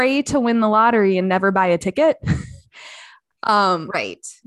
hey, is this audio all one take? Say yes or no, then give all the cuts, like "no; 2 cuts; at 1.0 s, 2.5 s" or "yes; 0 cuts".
yes; 0 cuts